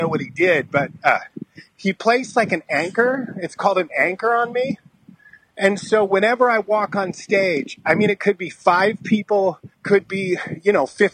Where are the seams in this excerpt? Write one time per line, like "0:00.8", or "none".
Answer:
0:09.7